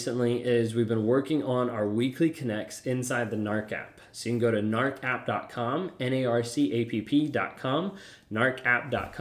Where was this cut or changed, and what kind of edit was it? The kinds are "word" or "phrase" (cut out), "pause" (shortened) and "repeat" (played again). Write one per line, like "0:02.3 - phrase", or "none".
none